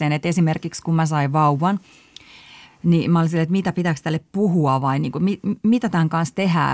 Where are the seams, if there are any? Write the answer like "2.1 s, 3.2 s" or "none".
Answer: none